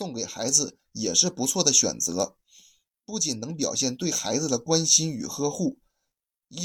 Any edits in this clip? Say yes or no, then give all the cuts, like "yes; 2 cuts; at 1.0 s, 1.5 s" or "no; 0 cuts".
no; 0 cuts